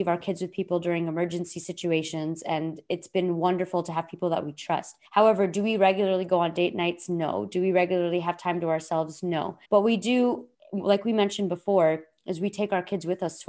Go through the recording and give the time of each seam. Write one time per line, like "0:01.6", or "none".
0:05.0
0:09.6
0:10.5